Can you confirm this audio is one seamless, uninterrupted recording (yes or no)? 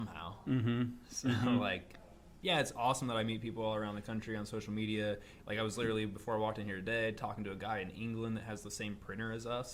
yes